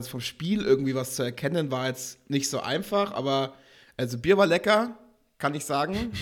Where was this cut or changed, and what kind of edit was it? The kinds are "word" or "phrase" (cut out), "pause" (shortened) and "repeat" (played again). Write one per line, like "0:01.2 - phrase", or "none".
none